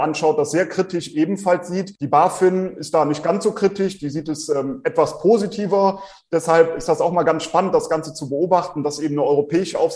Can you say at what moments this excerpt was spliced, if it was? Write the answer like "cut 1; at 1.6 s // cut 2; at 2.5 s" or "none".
cut 1; at 2.0 s